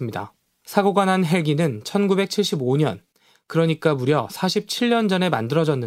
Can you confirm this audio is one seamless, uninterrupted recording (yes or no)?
yes